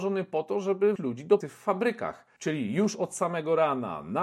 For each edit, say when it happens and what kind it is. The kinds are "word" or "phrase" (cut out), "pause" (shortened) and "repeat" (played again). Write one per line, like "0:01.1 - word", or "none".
0:01.0 - word
0:01.4 - word
0:02.4 - pause